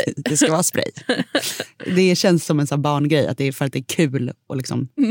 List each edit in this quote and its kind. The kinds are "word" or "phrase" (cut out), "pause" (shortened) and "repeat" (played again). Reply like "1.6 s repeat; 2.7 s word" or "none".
none